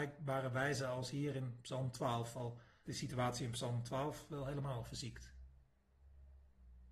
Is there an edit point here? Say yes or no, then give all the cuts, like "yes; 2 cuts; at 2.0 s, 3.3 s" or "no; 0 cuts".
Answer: yes; 1 cut; at 2.8 s